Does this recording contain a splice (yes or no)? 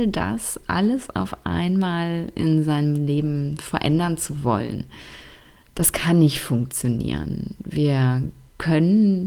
no